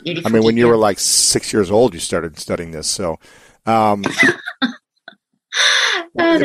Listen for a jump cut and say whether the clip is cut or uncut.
uncut